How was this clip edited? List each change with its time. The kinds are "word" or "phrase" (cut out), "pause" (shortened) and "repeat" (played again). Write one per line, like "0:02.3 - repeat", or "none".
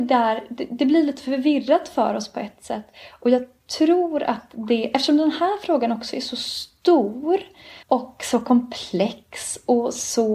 0:07.8 - pause

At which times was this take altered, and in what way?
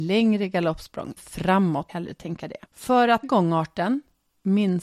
0:01.2 - word
0:01.9 - phrase
0:02.6 - pause
0:03.2 - word

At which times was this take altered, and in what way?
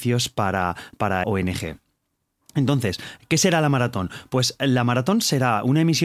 0:01.2 - word

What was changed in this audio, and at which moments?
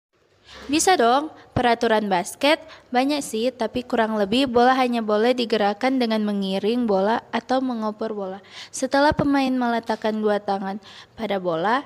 none

